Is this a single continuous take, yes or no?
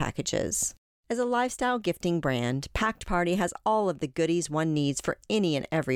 yes